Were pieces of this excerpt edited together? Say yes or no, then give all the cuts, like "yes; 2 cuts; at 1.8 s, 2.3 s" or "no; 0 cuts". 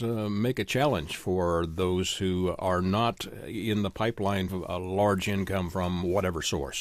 yes; 1 cut; at 4.5 s